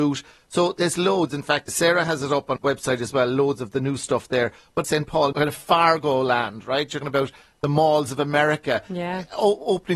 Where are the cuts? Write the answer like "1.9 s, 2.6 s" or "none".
1.7 s, 2.6 s, 4.8 s, 5.3 s, 7.0 s